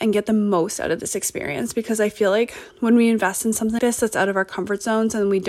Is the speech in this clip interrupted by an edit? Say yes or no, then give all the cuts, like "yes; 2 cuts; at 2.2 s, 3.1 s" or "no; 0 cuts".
yes; 2 cuts; at 2.7 s, 3.8 s